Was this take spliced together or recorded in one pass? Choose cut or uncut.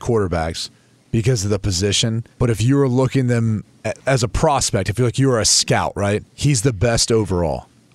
cut